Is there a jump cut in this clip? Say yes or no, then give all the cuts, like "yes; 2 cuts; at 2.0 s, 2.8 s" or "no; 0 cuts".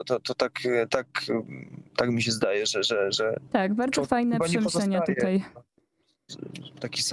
yes; 1 cut; at 1.9 s